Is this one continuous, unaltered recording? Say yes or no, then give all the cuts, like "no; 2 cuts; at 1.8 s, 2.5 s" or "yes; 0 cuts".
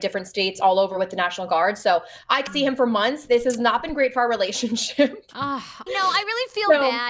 no; 2 cuts; at 2.5 s, 5.9 s